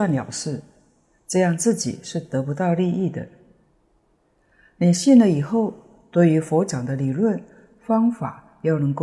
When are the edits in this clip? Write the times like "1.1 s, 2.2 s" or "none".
none